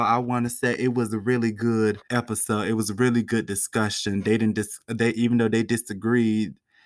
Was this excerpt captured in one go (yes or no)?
no